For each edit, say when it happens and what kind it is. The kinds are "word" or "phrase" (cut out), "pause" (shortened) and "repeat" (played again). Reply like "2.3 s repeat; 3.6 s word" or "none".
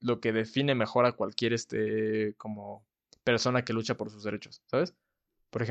none